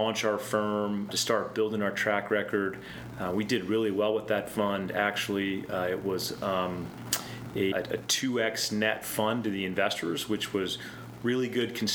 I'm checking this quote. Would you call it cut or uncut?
cut